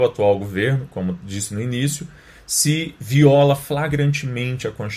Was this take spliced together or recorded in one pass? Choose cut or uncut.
uncut